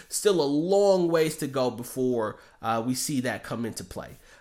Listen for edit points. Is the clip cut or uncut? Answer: uncut